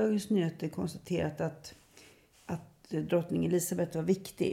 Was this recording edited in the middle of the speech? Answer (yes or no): no